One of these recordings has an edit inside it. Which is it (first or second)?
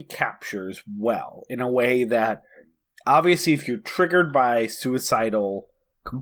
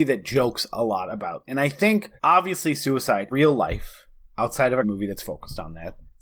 second